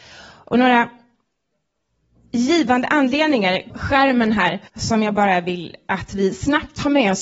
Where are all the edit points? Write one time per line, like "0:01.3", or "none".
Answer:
0:03.7
0:04.7